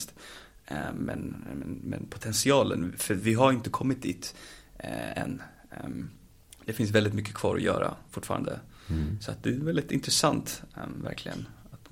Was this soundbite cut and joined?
no; 0 cuts

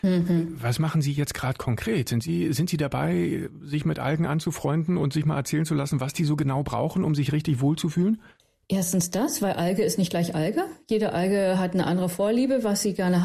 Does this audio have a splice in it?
no; 0 cuts

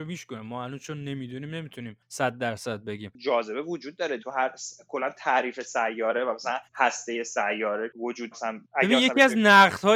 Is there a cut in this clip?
yes; 3 cuts; at 4.2 s, 6.7 s, 8.3 s

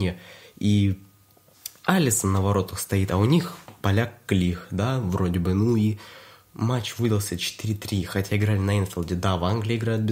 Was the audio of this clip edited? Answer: no; 0 cuts

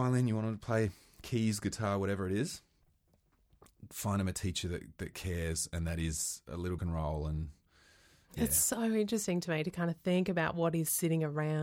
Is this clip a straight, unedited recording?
no; 1 cut; at 6.8 s

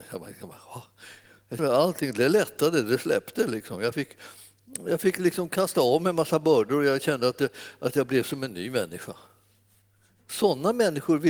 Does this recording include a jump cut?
yes; 1 cut; at 1.6 s

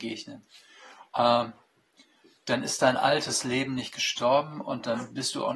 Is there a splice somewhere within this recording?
no; 0 cuts

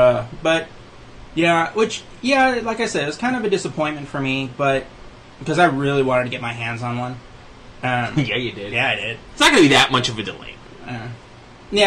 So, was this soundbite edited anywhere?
no; 0 cuts

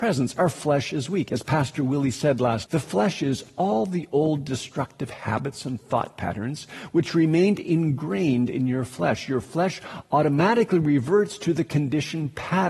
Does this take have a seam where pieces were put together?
yes; 1 cut; at 2.7 s

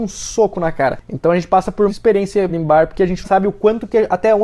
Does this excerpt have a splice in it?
yes; 3 cuts; at 1.9 s, 2.5 s, 3.2 s

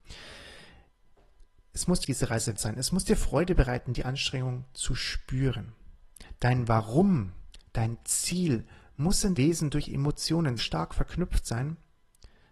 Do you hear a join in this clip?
yes; 4 cuts; at 2.0 s, 2.6 s, 9.4 s, 10.6 s

